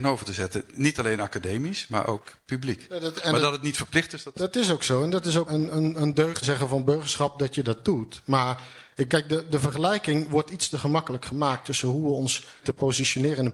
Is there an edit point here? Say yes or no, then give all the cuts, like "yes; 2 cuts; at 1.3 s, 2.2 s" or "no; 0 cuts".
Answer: yes; 4 cuts; at 5.5 s, 6.4 s, 9.1 s, 12.6 s